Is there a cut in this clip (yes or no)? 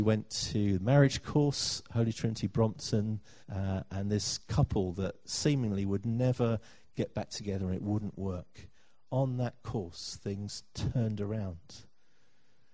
yes